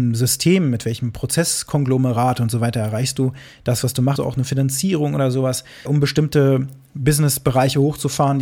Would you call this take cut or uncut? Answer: cut